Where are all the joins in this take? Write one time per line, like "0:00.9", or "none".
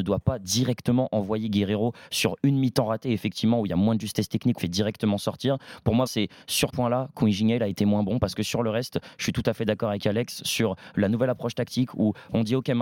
0:04.6
0:06.1
0:06.7